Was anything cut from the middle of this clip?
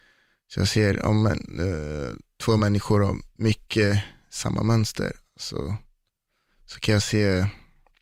no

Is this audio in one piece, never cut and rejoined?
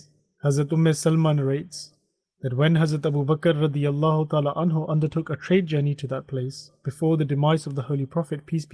yes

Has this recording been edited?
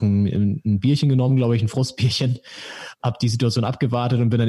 no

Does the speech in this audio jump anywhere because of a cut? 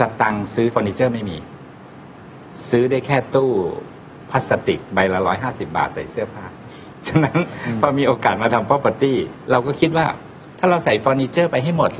no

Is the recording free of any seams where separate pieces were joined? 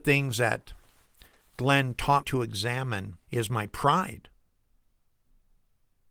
no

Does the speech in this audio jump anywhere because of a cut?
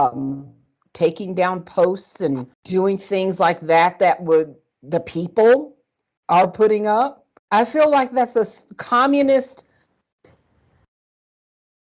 yes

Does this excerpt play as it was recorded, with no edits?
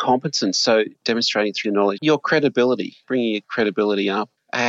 no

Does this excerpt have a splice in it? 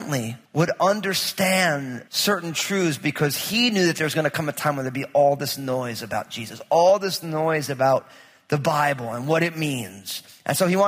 no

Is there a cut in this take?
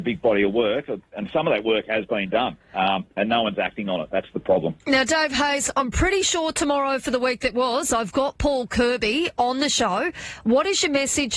yes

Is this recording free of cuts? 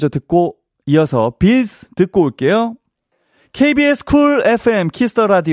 yes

